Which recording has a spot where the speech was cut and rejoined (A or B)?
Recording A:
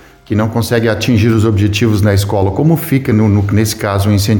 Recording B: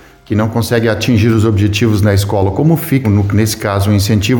B